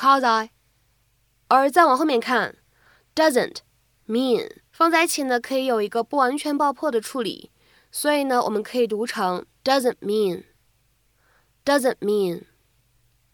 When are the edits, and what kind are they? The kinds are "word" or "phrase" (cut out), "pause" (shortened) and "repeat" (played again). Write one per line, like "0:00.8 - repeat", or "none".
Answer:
0:04.7 - pause